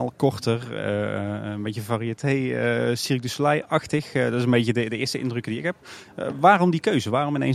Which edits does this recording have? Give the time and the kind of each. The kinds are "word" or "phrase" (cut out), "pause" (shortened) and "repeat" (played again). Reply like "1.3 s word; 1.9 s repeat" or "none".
none